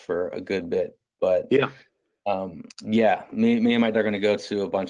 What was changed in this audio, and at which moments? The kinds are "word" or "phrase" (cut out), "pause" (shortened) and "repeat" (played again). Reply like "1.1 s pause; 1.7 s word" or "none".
2.7 s pause; 3.9 s word